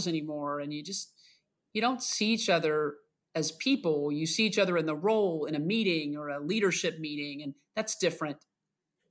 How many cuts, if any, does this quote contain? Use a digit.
0